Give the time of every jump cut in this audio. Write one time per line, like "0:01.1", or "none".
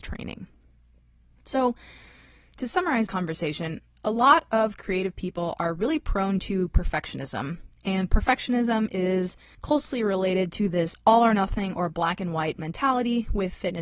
0:03.1
0:09.5